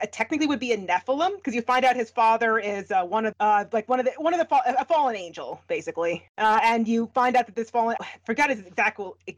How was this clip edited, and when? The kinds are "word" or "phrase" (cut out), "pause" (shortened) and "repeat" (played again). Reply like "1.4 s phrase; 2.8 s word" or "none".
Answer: 3.3 s phrase; 8.0 s word